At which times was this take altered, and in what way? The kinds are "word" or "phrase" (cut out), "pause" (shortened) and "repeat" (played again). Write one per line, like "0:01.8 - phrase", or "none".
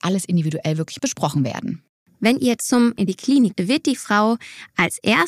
0:01.0 - phrase
0:02.6 - word
0:03.0 - phrase
0:03.5 - word